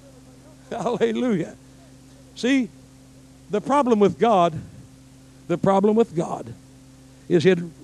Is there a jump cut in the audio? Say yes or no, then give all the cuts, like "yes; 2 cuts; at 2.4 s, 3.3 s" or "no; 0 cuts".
no; 0 cuts